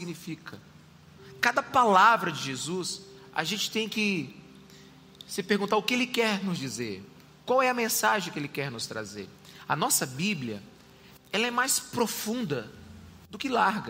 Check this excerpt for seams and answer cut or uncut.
uncut